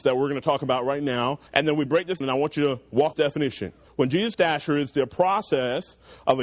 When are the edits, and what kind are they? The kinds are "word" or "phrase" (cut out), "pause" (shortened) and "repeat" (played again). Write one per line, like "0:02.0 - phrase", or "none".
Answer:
0:01.5 - pause
0:01.9 - phrase
0:02.2 - word
0:03.1 - phrase
0:03.9 - pause
0:04.3 - word